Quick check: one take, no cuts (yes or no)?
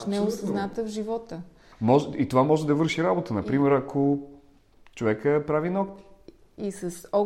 yes